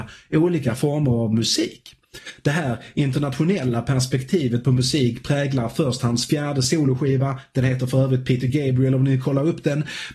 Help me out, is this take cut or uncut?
uncut